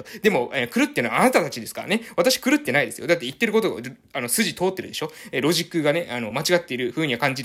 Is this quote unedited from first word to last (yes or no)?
yes